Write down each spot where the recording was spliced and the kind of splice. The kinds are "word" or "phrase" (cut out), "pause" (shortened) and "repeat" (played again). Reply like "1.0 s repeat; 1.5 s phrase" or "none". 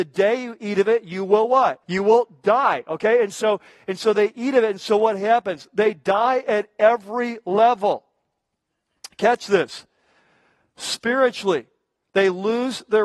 1.8 s pause